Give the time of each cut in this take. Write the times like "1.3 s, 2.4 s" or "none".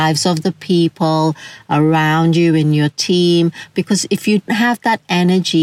4.5 s